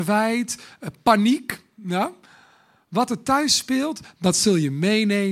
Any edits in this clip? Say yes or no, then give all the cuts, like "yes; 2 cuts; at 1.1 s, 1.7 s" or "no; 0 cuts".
no; 0 cuts